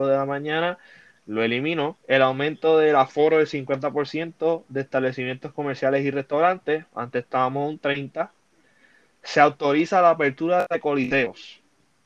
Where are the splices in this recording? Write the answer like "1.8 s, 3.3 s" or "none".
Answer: 2.0 s